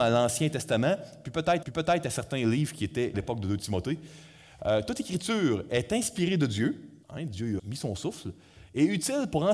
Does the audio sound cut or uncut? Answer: cut